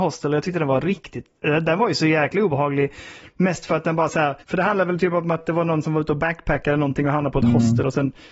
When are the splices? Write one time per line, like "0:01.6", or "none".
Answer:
0:04.4